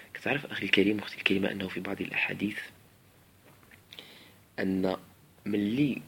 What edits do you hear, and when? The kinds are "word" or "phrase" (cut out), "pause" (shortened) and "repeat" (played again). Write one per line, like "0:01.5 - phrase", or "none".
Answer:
none